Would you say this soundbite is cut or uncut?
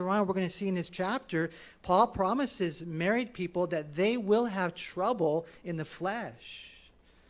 uncut